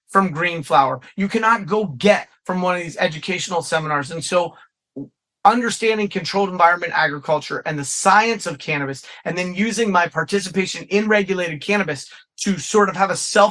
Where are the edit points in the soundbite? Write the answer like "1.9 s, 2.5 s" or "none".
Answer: none